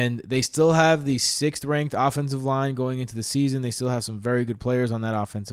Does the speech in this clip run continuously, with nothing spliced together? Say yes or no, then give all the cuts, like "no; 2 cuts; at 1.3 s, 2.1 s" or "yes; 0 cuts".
yes; 0 cuts